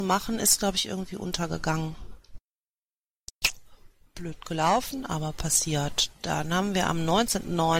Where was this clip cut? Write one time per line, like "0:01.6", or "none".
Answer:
none